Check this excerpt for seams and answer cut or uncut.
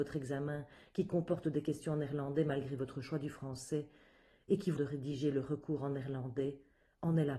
cut